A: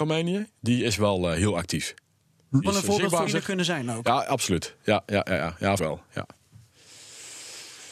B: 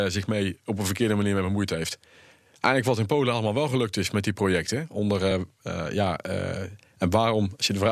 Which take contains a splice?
A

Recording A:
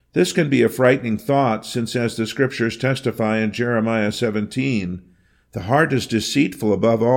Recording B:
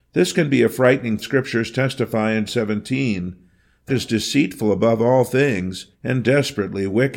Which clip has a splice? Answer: B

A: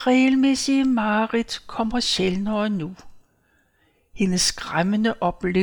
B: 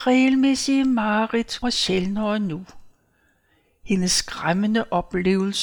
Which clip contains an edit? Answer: B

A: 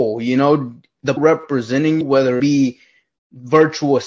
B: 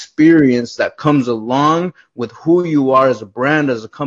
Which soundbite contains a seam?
A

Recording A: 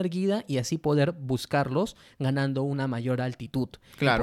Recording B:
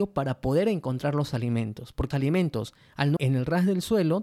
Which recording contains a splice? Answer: B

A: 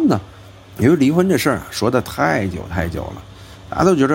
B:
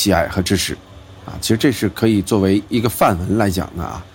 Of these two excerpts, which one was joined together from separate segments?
B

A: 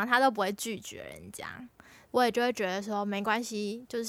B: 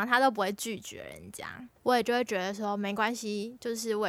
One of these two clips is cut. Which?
B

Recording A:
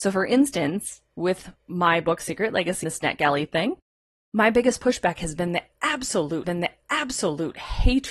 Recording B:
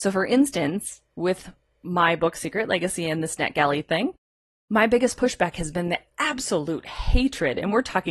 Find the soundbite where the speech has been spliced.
A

